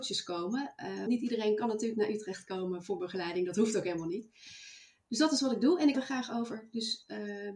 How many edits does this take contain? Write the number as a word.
two